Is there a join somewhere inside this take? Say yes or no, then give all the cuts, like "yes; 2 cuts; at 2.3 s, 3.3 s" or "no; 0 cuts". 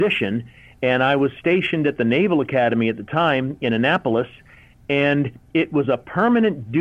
no; 0 cuts